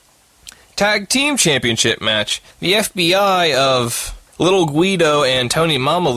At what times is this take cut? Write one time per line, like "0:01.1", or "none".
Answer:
0:02.5
0:04.3